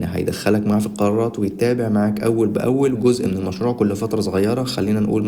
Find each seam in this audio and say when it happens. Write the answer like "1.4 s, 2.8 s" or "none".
2.9 s